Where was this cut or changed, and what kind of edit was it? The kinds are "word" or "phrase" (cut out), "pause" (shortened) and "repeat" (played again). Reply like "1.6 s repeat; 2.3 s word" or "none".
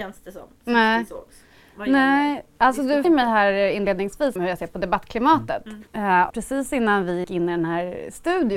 3.0 s word; 4.4 s word; 5.9 s pause; 6.3 s word; 7.2 s word